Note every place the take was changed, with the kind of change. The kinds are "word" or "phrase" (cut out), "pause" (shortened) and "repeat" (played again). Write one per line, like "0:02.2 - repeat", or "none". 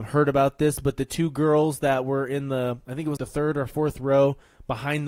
0:03.2 - word